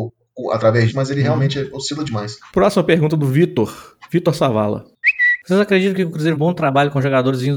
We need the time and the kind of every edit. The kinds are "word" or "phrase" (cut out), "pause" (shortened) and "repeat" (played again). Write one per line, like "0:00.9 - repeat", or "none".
0:00.9 - word
0:06.4 - phrase